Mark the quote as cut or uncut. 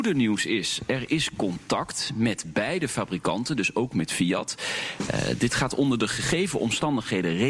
uncut